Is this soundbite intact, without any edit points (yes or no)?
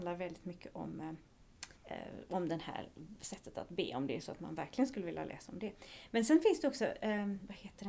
no